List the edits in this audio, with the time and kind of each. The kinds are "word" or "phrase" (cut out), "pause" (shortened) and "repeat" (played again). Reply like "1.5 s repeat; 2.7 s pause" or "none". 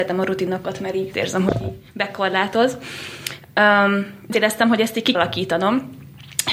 1.1 s word; 1.9 s pause; 4.3 s word; 5.1 s word